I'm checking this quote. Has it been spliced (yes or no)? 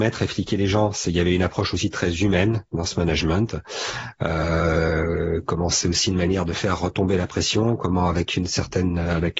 no